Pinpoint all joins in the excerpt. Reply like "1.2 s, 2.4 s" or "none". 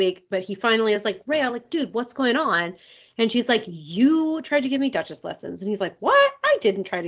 none